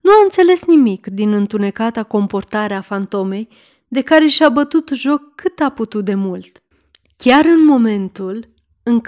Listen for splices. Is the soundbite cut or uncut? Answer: uncut